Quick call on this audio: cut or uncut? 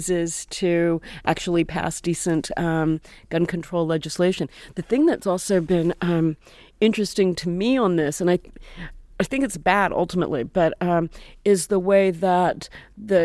uncut